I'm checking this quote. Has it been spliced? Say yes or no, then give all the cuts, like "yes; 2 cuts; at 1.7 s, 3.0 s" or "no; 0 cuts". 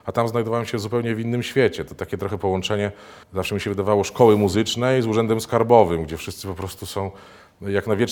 yes; 1 cut; at 3.2 s